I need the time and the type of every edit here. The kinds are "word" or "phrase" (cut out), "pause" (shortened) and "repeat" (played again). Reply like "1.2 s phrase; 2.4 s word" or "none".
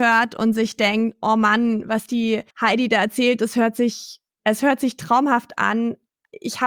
2.5 s pause